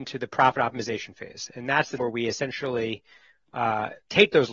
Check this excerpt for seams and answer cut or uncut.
cut